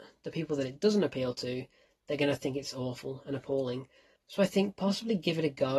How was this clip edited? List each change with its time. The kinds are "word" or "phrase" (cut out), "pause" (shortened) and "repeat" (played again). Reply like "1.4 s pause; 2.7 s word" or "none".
none